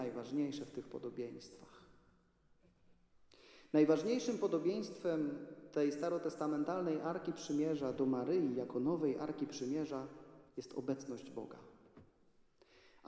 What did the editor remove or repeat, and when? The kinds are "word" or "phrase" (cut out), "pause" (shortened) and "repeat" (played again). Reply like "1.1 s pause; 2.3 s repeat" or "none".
10.5 s pause